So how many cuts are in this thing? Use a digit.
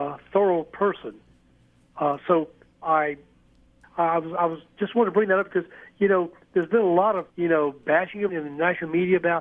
3